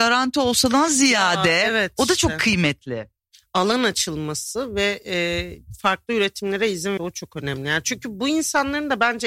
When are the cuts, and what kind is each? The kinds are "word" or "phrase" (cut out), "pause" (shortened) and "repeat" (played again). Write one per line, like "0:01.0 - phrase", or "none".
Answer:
0:07.0 - word